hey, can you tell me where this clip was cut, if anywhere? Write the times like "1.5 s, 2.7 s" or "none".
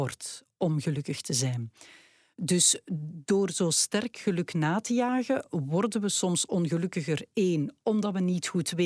none